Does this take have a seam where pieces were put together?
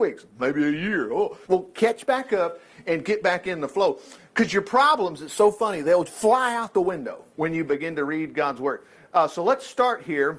yes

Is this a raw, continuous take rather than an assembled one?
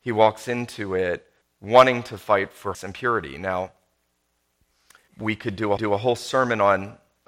no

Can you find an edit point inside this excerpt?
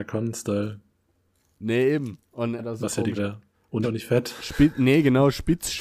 yes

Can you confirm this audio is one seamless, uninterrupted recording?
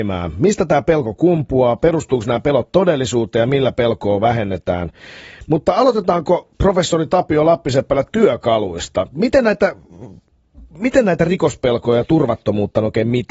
no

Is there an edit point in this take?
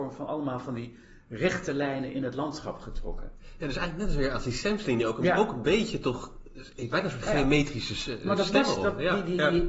no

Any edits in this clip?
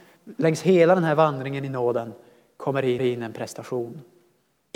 yes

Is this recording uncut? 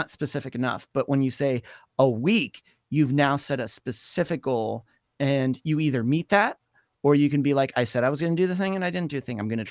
yes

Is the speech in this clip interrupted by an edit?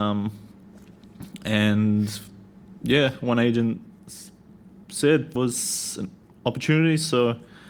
yes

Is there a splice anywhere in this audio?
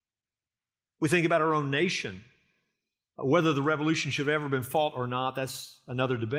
no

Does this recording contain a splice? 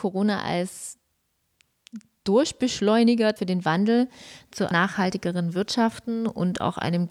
yes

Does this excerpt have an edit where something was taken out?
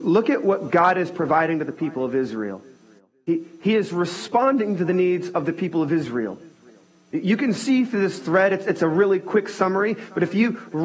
no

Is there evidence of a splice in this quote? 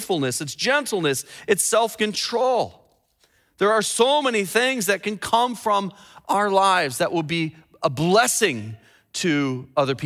no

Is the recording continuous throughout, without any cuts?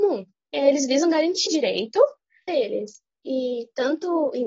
no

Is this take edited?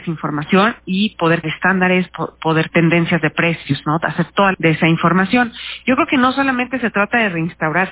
yes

